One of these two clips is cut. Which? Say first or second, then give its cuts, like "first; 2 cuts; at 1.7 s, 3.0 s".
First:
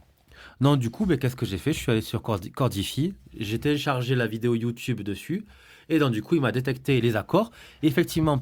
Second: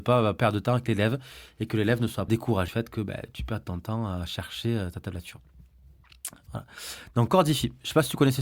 second; 2 cuts; at 2.3 s, 2.7 s